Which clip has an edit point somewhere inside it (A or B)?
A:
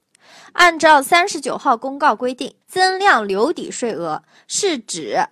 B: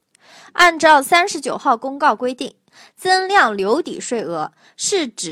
A